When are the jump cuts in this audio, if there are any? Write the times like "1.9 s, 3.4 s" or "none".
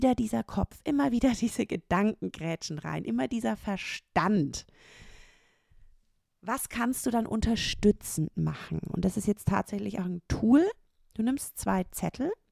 10.0 s